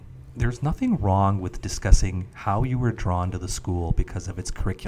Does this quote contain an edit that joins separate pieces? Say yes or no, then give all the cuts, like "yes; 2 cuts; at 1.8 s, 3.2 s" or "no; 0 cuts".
no; 0 cuts